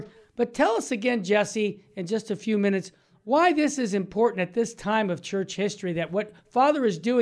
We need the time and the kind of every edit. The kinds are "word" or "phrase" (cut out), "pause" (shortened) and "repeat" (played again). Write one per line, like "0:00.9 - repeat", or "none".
none